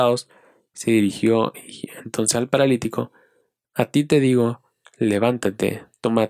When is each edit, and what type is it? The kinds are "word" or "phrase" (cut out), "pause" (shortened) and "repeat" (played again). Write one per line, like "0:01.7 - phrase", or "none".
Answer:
none